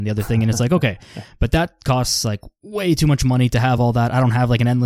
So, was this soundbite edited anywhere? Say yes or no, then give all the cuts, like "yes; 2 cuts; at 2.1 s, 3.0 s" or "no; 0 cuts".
no; 0 cuts